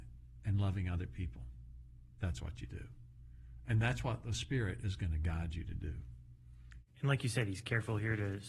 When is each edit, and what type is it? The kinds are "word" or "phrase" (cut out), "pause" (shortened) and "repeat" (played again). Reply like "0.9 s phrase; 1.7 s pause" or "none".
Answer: 6.9 s pause